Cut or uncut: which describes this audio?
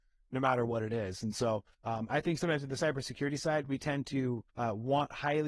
cut